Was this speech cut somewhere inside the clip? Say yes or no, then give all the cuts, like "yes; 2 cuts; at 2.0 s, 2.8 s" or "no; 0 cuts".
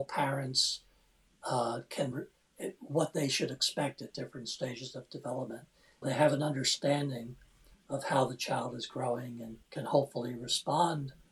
yes; 3 cuts; at 2.1 s, 6.0 s, 9.6 s